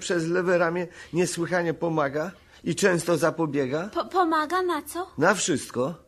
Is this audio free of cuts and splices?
yes; 0 cuts

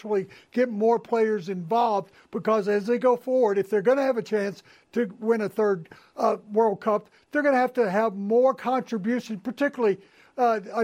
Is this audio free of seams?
yes; 0 cuts

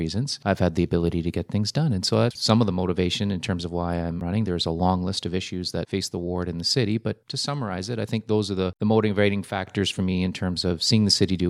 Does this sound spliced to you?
no; 0 cuts

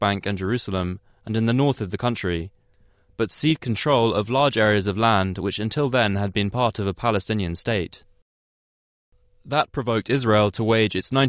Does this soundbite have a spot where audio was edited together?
no; 0 cuts

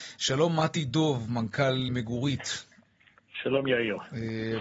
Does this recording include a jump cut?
yes; 1 cut; at 1.9 s

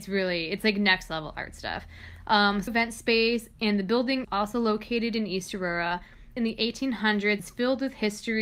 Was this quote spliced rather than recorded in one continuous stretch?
yes; 4 cuts; at 2.7 s, 4.2 s, 6.4 s, 7.4 s

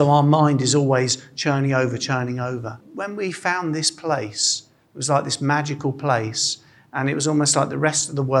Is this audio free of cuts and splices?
yes; 0 cuts

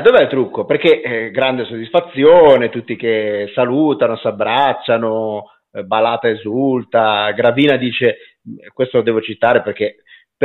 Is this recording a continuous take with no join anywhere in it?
yes; 0 cuts

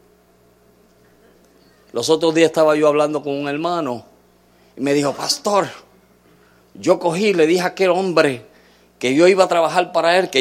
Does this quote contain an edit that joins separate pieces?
no; 0 cuts

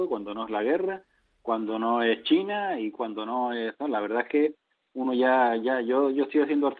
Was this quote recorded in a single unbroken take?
yes; 0 cuts

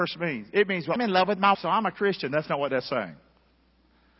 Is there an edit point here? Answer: yes; 2 cuts; at 1.0 s, 1.5 s

